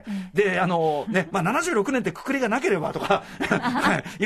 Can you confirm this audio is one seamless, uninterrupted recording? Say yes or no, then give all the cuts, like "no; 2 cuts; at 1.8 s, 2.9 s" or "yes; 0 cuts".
yes; 0 cuts